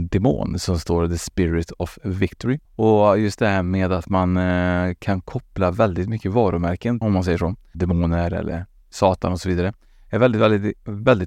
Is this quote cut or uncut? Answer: cut